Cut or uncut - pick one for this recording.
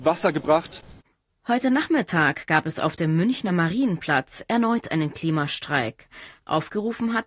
uncut